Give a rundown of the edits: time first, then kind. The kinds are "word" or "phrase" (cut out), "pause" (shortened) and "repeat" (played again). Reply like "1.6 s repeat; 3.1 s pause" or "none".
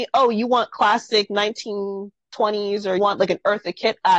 3.0 s word